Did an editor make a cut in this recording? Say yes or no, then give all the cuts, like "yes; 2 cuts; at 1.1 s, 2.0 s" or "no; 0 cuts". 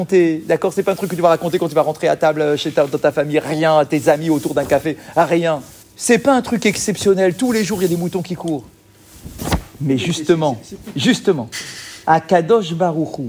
yes; 2 cuts; at 5.8 s, 12.0 s